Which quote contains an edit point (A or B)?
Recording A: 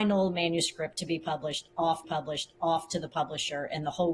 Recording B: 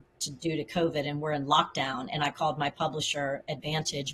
A